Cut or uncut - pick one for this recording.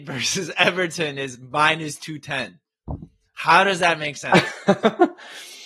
uncut